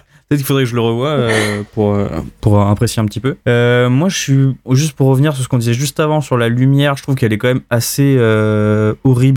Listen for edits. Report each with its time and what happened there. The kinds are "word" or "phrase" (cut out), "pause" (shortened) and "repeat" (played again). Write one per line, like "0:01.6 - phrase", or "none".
0:03.4 - pause